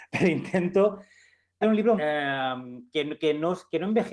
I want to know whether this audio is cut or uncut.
cut